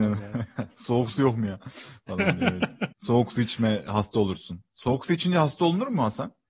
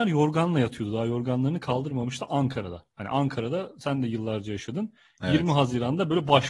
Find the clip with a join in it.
first; 1 cut; at 2.9 s

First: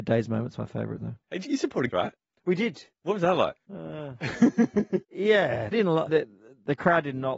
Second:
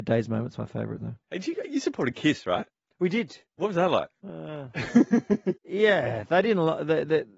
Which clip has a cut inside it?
first; 4 cuts; at 1.4 s, 1.9 s, 5.7 s, 6.1 s

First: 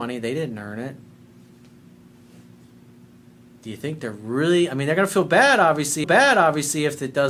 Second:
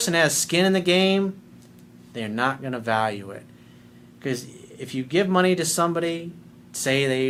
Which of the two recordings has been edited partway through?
first; 1 cut; at 6.0 s

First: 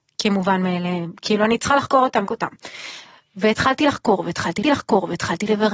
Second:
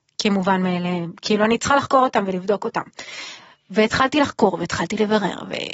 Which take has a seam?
first; 2 cuts; at 2.3 s, 4.6 s

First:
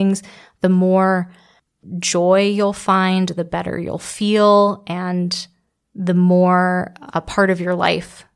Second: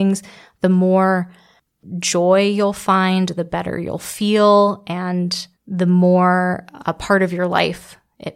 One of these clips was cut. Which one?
second; 1 cut; at 5.6 s

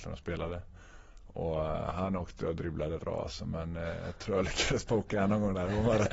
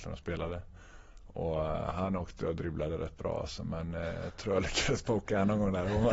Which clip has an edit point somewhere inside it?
first; 1 cut; at 3.0 s

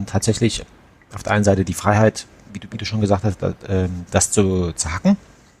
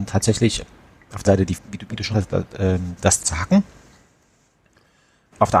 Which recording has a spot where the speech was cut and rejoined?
second; 4 cuts; at 1.2 s, 1.5 s, 2.1 s, 3.2 s

